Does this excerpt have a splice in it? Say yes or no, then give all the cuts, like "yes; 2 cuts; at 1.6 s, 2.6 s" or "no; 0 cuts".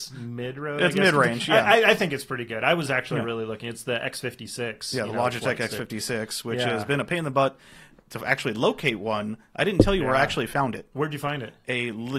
no; 0 cuts